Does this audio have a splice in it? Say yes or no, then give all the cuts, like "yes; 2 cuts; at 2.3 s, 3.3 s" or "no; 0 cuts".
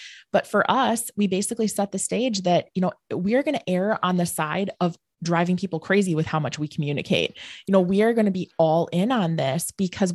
no; 0 cuts